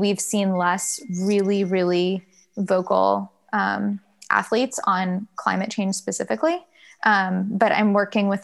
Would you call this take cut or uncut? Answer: uncut